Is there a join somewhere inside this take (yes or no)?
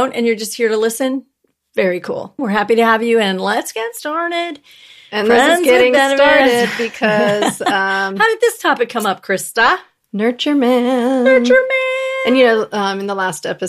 no